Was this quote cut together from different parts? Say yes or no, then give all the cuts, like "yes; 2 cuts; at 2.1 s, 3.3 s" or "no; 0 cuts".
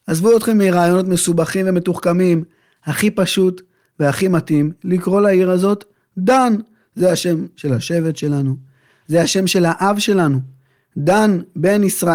no; 0 cuts